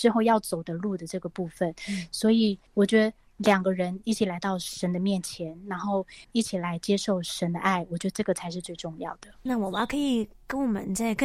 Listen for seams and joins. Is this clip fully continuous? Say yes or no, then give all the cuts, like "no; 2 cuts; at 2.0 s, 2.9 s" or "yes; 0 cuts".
no; 2 cuts; at 2.7 s, 6.2 s